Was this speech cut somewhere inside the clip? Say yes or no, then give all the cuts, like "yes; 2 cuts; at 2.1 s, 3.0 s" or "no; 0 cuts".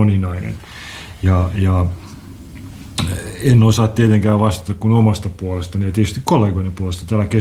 no; 0 cuts